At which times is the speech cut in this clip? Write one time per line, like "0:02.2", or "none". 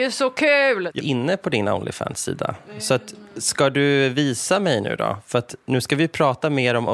0:01.0